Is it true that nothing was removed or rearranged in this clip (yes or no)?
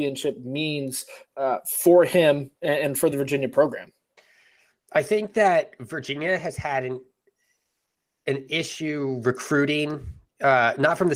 yes